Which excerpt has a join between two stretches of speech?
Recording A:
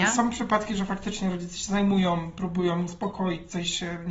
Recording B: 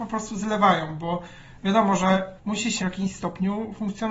B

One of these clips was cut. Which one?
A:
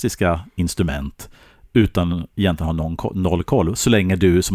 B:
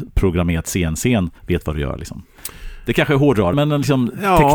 B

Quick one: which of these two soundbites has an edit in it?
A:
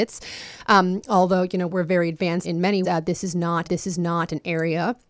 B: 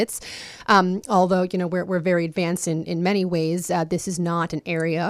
A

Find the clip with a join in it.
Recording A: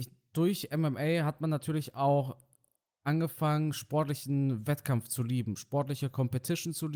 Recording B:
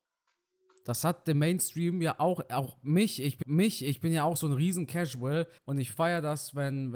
B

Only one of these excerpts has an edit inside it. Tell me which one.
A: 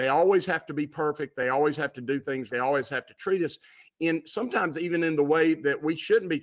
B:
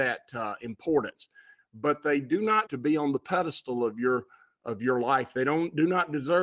B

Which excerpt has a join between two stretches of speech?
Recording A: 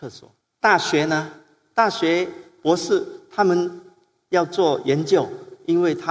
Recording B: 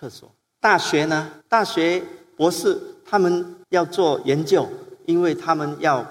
B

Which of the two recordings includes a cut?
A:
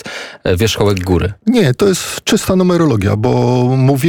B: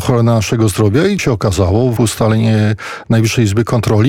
B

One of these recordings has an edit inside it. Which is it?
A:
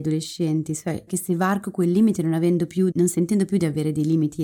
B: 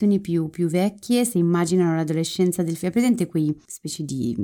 A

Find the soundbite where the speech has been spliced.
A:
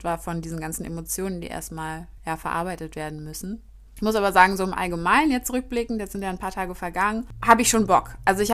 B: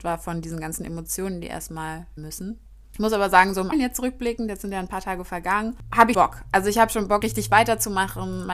B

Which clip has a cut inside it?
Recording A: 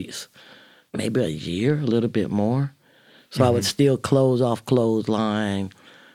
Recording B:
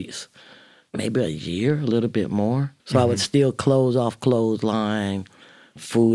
B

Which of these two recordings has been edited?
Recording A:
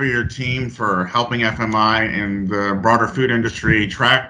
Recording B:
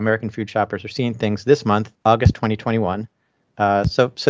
B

